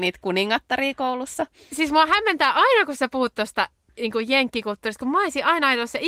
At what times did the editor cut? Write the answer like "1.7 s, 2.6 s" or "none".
none